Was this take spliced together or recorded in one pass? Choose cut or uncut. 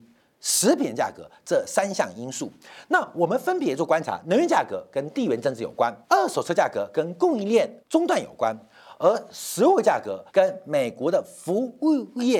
cut